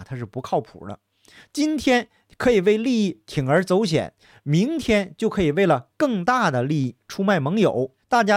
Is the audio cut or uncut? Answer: uncut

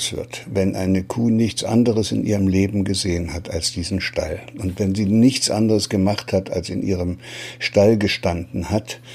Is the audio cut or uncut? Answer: uncut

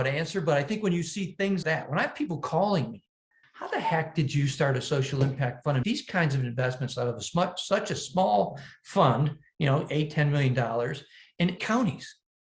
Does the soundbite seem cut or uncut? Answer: cut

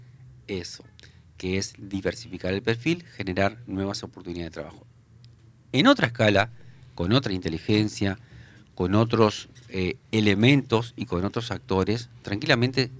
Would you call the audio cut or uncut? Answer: uncut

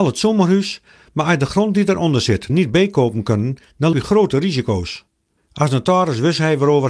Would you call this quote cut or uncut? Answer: cut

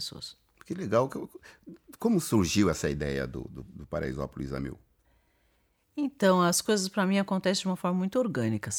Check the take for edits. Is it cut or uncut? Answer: uncut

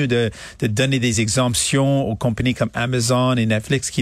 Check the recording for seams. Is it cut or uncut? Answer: uncut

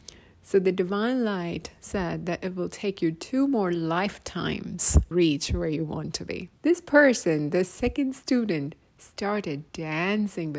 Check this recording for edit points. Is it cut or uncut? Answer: cut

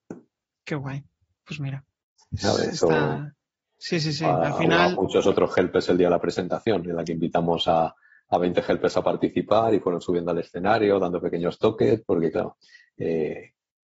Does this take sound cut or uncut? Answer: uncut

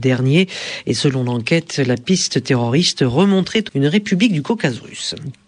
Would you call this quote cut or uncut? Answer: cut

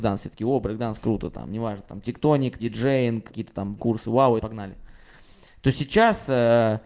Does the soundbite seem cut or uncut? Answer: cut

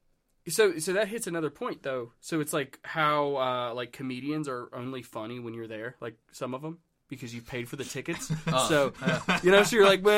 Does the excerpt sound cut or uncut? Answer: uncut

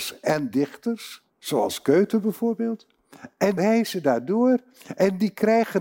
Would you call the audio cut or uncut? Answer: cut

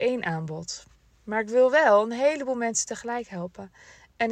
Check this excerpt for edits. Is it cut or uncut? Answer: uncut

